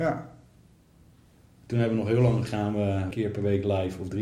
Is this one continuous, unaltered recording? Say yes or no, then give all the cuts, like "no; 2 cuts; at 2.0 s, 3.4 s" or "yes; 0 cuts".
no; 2 cuts; at 2.4 s, 3.1 s